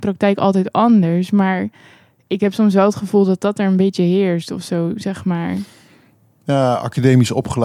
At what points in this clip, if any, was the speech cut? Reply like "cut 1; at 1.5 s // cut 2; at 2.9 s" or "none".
none